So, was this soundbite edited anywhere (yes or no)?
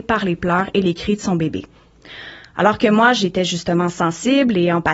no